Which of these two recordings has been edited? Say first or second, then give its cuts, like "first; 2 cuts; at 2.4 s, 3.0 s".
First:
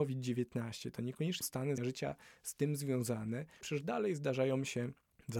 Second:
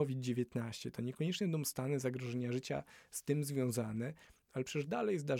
first; 3 cuts; at 1.4 s, 1.8 s, 3.6 s